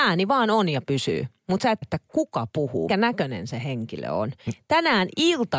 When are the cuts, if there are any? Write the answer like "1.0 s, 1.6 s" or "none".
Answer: 1.8 s, 2.9 s